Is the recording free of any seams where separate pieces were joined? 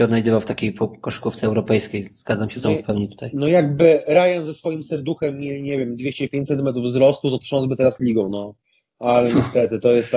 yes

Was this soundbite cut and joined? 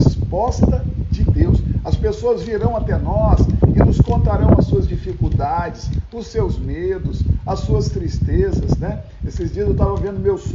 no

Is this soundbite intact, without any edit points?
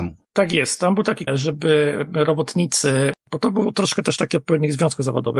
no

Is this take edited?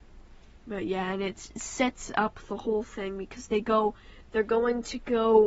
no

